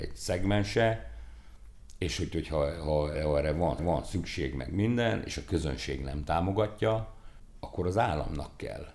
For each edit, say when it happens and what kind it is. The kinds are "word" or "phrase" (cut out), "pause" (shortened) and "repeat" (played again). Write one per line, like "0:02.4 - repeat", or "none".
0:03.1 - word
0:03.8 - repeat